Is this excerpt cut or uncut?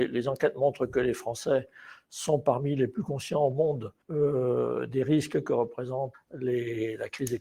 cut